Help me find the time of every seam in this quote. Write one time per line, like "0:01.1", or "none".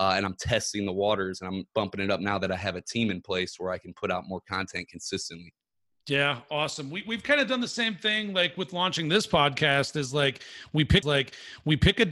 0:01.7
0:11.0

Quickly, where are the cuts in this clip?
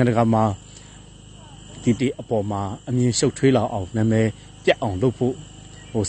0:02.0

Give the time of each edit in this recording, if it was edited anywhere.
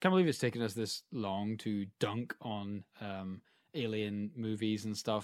none

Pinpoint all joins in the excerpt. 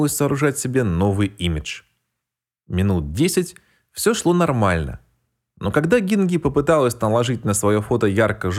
none

